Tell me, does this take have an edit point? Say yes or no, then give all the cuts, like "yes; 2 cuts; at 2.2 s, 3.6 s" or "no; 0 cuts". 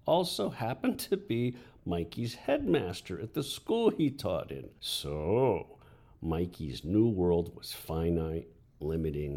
yes; 1 cut; at 4.8 s